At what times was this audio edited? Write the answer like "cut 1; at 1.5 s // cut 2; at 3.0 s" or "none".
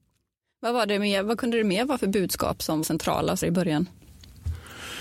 cut 1; at 2.8 s // cut 2; at 3.4 s